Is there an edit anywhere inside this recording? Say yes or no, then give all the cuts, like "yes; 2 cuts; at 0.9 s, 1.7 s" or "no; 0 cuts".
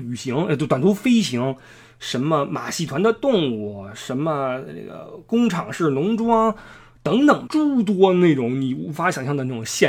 yes; 1 cut; at 7.5 s